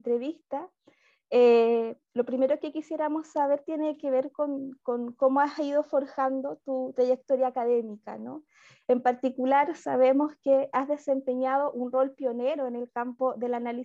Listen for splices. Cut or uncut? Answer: uncut